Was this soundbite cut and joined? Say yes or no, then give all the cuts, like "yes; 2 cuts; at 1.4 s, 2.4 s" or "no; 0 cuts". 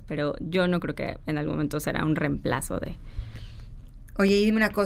no; 0 cuts